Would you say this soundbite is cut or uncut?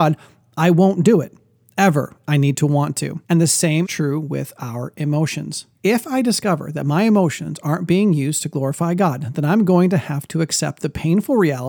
cut